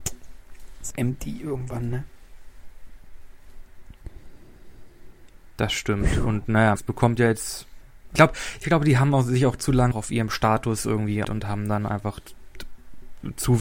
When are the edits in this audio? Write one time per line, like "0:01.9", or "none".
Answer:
0:00.9
0:06.8
0:08.2
0:09.9
0:11.2